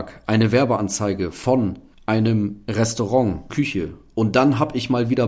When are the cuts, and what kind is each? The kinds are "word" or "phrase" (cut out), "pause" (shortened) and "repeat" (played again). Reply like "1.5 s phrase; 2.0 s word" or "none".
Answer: 1.9 s pause; 3.5 s word